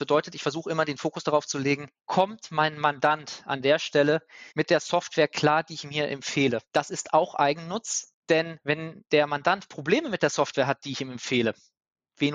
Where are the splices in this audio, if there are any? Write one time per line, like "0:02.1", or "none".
0:02.0
0:04.5
0:06.7